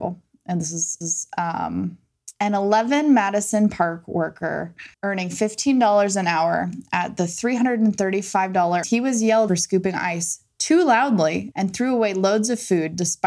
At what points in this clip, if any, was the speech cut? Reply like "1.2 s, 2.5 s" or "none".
1.0 s, 4.9 s, 8.8 s, 9.5 s, 11.5 s